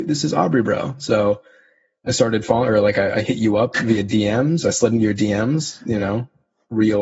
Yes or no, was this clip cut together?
no